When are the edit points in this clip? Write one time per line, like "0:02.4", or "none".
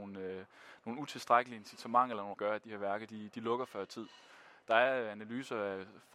0:02.3